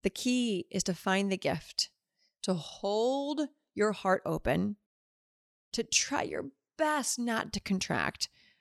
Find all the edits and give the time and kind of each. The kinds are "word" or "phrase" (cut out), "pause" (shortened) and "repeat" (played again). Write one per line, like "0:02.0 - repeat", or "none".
none